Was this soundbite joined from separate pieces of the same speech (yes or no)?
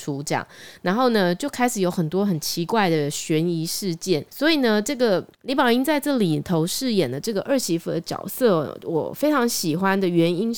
yes